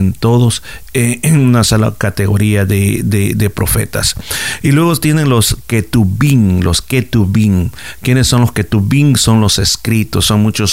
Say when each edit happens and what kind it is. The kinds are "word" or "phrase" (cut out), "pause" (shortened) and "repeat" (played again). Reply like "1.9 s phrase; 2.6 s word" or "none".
none